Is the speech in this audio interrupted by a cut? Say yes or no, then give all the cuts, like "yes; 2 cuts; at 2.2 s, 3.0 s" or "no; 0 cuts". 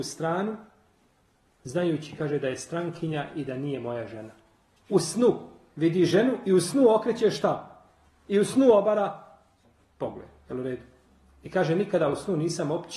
no; 0 cuts